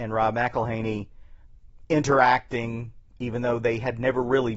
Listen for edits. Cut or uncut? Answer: uncut